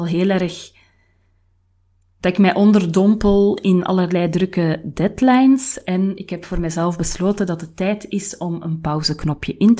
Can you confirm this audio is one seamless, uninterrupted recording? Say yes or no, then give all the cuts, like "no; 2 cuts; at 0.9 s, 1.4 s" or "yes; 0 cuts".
yes; 0 cuts